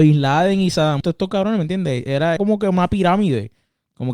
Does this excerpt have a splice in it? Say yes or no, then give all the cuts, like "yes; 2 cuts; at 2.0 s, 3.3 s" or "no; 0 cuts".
yes; 2 cuts; at 1.0 s, 2.4 s